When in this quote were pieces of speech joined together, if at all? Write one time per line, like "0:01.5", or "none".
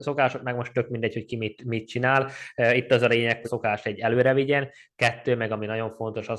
0:03.4